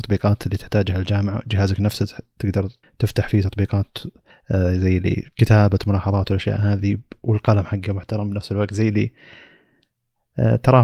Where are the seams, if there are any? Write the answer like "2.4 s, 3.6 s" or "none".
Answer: 2.8 s, 4.3 s, 5.3 s